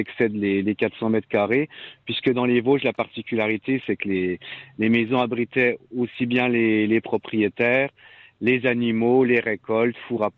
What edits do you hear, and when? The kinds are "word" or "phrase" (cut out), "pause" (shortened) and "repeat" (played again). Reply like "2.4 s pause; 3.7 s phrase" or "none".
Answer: none